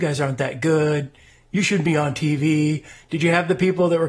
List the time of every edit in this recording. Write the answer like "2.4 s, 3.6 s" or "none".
none

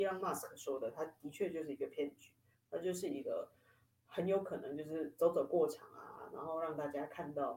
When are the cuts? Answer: none

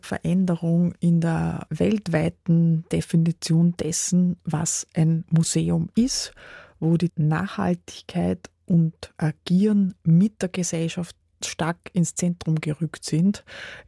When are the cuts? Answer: 7.1 s, 11.4 s

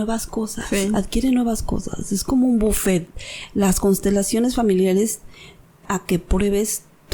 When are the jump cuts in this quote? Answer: 5.8 s

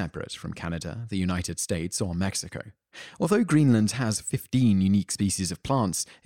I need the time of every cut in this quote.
none

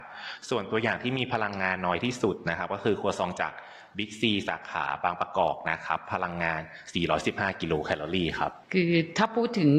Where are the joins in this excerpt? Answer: 8.6 s

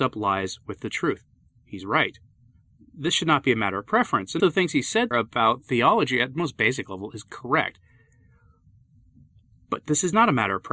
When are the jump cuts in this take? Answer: 4.4 s, 5.1 s

